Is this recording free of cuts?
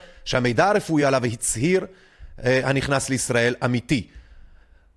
yes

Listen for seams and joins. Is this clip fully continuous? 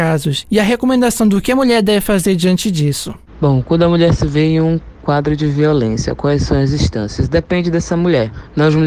yes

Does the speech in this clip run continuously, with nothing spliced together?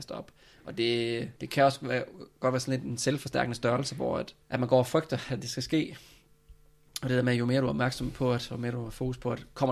no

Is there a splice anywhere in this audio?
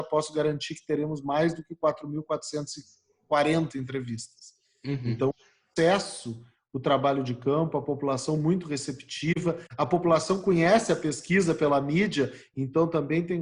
no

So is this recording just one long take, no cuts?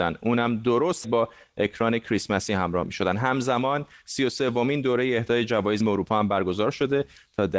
no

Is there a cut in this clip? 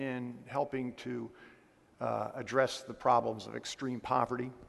no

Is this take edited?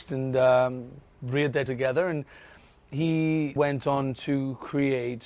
yes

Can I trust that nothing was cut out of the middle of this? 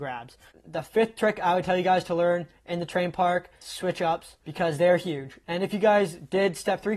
no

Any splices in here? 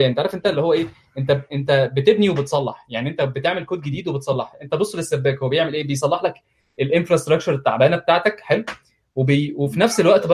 no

